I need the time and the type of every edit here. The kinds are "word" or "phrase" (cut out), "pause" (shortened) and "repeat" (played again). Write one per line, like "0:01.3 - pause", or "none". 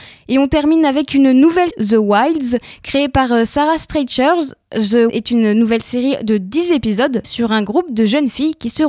0:01.7 - word
0:05.1 - word
0:07.2 - word